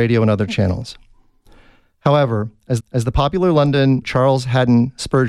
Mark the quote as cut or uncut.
cut